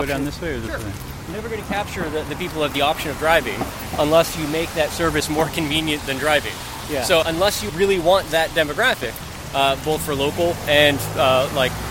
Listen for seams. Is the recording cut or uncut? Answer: cut